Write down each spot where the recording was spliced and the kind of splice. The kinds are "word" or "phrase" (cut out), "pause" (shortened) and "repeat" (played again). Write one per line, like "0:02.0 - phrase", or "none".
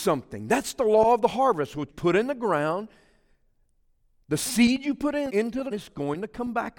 0:01.9 - word
0:05.3 - word
0:05.7 - word